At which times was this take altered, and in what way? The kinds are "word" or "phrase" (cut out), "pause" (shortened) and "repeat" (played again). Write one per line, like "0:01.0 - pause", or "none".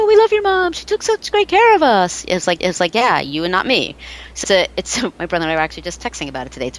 0:02.6 - repeat
0:04.4 - word